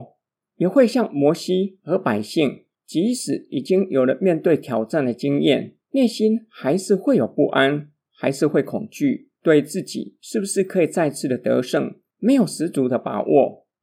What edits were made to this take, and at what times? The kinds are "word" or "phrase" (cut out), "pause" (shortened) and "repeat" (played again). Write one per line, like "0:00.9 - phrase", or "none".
0:05.8 - pause
0:09.4 - pause

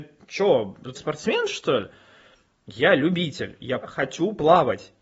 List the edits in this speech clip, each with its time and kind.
0:01.0 - word
0:03.8 - word

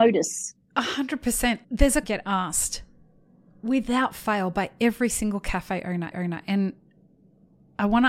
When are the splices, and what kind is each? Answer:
0:01.6 - word
0:02.0 - phrase
0:06.1 - repeat

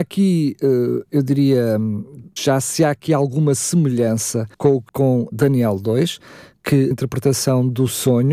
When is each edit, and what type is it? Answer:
0:02.4 - word
0:04.5 - pause
0:04.9 - word
0:05.3 - word
0:06.9 - word

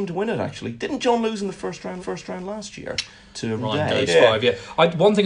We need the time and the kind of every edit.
0:02.0 - repeat
0:03.6 - word
0:04.1 - word

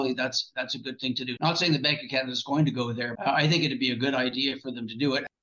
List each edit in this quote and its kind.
0:01.4 - word
0:03.1 - word

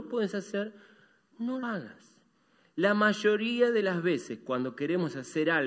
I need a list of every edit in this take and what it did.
0:01.6 - word

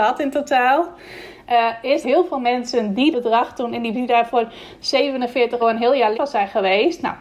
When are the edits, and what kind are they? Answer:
0:02.0 - word
0:03.1 - word
0:03.9 - phrase
0:05.6 - word
0:06.1 - word

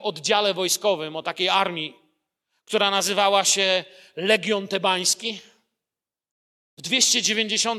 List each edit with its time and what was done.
none

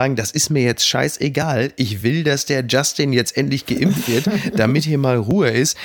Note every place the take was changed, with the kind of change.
none

